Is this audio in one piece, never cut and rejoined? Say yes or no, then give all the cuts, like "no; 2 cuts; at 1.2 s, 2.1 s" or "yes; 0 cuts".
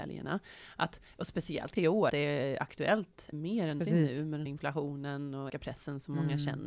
no; 6 cuts; at 1.8 s, 2.1 s, 3.3 s, 3.8 s, 4.5 s, 5.5 s